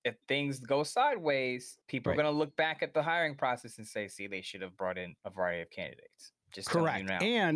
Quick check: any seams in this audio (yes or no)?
yes